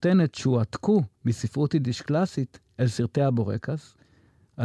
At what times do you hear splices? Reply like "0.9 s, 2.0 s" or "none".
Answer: 1.2 s